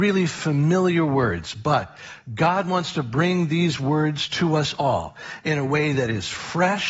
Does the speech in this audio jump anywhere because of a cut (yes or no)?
no